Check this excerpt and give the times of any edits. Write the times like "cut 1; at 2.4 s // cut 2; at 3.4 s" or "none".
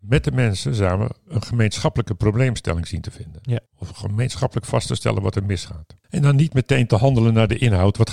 cut 1; at 3.7 s